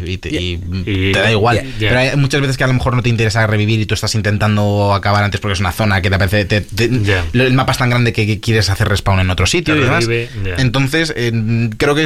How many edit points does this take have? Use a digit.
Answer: 0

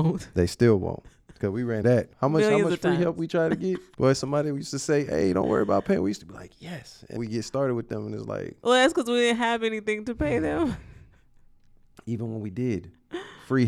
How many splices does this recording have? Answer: 4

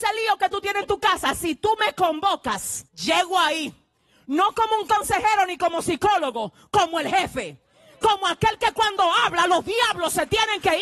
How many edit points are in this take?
1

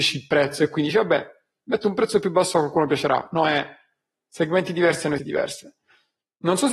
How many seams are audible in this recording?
1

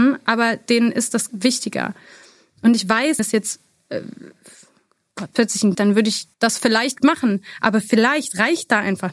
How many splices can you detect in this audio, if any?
6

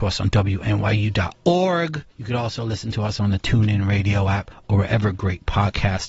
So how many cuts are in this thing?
1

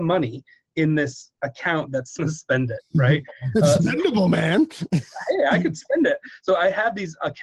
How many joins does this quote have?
1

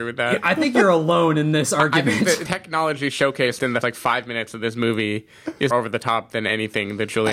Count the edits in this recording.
3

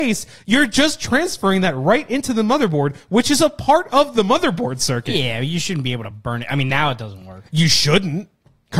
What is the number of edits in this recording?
0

